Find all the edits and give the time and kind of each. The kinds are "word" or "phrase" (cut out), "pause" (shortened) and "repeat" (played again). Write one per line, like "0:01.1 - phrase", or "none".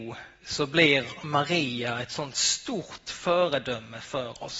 none

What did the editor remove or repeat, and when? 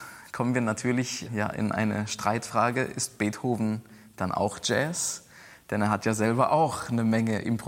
none

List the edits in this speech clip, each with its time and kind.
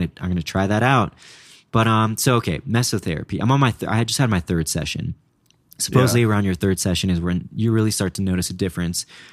none

